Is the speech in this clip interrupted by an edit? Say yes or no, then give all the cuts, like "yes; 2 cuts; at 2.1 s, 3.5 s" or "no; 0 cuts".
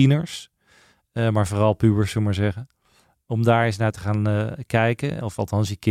no; 0 cuts